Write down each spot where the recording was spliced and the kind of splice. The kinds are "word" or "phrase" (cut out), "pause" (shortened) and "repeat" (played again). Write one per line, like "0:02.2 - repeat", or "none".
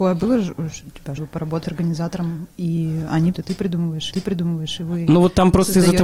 0:01.2 - phrase
0:01.6 - word
0:03.3 - word
0:04.1 - repeat

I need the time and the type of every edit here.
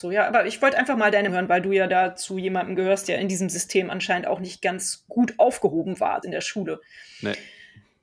0:01.3 - word
0:05.1 - word
0:06.2 - word

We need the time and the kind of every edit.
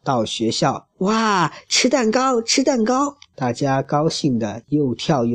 0:00.9 - pause
0:03.2 - pause

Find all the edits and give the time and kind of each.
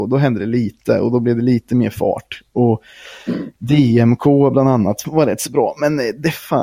0:05.0 - word

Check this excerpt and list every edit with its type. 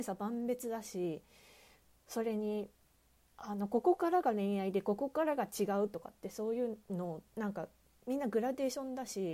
0:06.8 - pause

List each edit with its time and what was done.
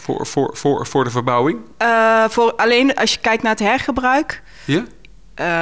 none

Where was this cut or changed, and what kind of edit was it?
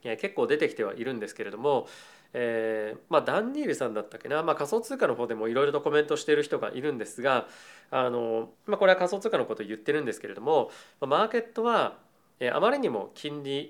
0:08.5 - pause

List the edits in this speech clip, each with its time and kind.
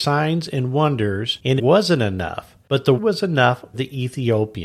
0:01.6 - word
0:03.0 - word
0:03.7 - word

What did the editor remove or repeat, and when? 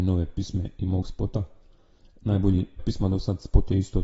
0:01.0 - word
0:02.8 - word

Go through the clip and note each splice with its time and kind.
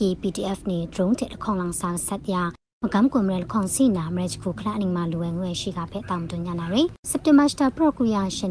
0:07.0 - pause

